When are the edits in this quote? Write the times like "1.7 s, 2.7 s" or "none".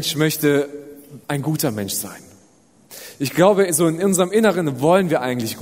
1.2 s